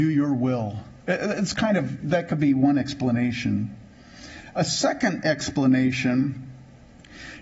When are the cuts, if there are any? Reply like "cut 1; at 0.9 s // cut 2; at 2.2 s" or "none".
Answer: cut 1; at 1.0 s